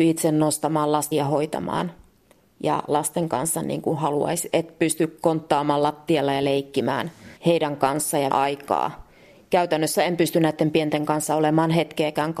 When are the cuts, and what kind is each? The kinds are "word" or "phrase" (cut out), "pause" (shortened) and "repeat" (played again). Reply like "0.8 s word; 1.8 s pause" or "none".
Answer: 1.1 s word; 2.9 s word; 7.4 s pause; 8.3 s word

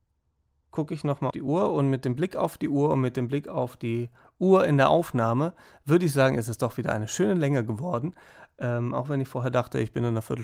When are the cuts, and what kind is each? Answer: 1.3 s word

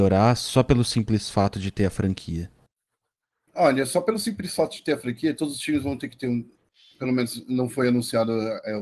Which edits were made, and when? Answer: none

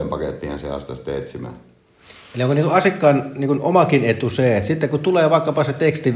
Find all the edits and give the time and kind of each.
none

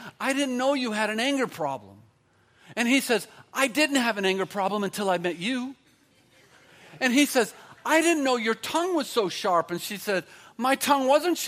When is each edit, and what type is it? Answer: none

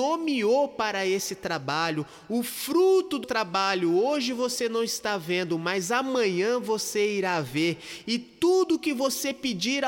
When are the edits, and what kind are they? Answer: 3.2 s word

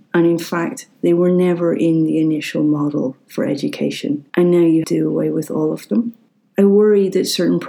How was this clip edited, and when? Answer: 4.3 s pause; 4.8 s phrase

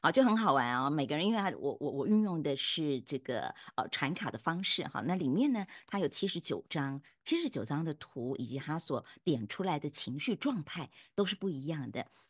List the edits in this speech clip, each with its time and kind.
none

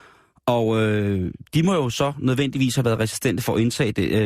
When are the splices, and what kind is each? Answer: none

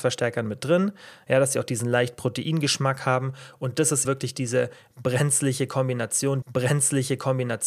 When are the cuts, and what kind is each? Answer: 4.0 s word; 6.4 s repeat

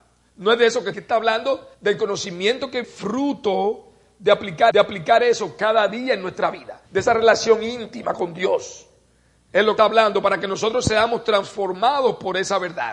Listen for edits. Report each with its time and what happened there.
0.9 s phrase; 1.7 s pause; 2.8 s word; 4.7 s repeat; 6.9 s pause; 9.8 s word

